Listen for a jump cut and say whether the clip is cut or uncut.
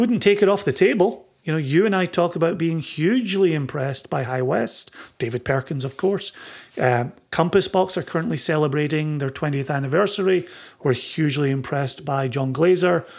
uncut